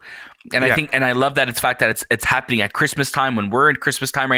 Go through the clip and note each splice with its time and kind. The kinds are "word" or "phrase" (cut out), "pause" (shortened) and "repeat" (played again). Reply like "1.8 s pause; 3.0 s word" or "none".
none